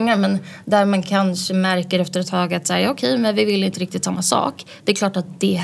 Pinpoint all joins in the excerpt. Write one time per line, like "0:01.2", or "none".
none